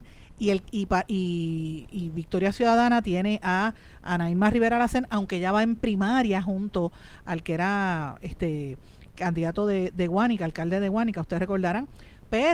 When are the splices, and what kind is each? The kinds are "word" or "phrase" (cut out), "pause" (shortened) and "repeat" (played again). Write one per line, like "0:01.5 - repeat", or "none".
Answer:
none

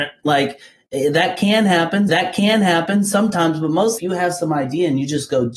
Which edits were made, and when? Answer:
0:02.1 - repeat
0:04.0 - phrase

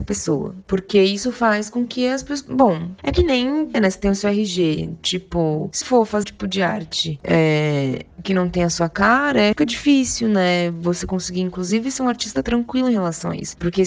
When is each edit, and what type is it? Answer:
0:03.0 - pause
0:03.7 - word
0:05.8 - word
0:06.2 - word
0:08.1 - pause
0:09.5 - word

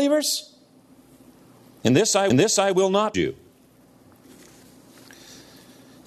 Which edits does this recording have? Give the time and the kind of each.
0:02.3 - repeat
0:03.1 - word

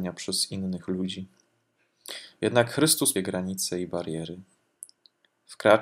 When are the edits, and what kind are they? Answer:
0:03.1 - phrase

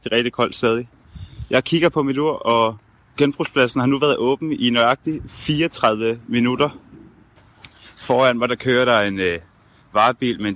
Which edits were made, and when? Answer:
none

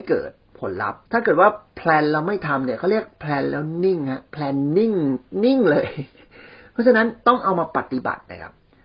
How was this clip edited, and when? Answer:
0:01.1 - pause
0:07.2 - pause

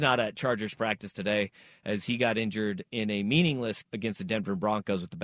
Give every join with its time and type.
0:03.8 - word

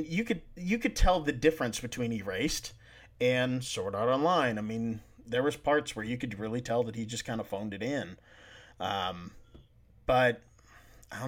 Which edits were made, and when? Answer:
none

